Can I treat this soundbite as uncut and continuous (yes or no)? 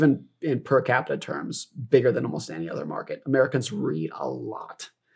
yes